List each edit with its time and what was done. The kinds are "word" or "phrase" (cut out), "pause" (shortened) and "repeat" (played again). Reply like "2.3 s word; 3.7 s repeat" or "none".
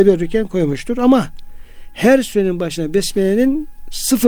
none